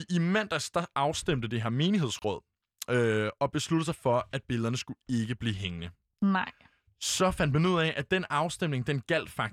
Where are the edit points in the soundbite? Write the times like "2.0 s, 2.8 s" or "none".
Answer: none